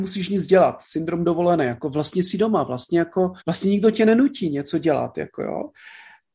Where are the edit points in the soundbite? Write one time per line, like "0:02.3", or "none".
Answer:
0:03.4